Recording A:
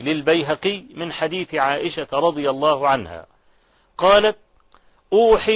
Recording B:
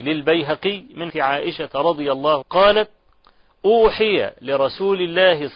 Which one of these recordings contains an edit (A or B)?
B